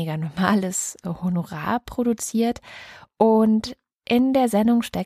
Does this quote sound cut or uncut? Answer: uncut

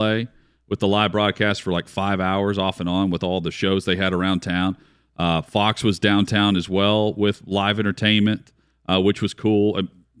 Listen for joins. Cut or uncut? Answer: uncut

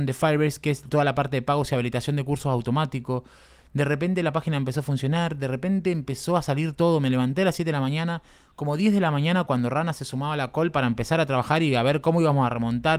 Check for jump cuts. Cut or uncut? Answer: uncut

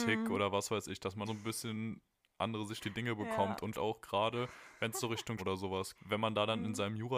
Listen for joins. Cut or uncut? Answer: cut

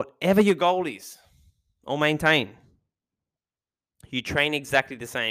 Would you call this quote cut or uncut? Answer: uncut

